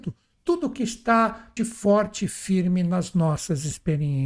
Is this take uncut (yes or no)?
no